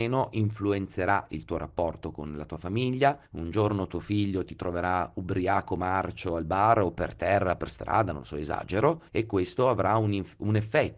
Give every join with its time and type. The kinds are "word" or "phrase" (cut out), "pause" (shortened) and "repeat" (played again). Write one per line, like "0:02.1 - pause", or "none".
0:03.3 - pause
0:09.1 - pause